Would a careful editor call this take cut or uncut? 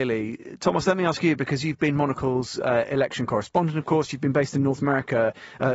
uncut